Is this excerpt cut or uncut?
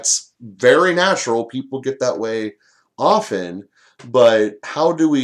uncut